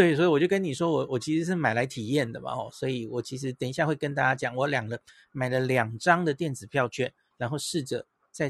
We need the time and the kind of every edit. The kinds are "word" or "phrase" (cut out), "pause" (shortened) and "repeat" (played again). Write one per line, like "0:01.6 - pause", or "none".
none